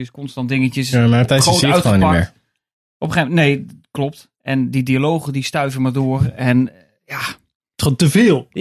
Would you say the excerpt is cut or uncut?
uncut